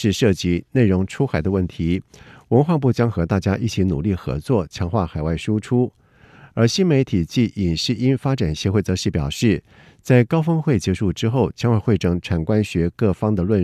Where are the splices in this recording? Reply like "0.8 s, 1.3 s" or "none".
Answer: none